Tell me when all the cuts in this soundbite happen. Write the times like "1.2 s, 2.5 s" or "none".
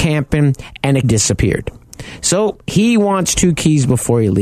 1.0 s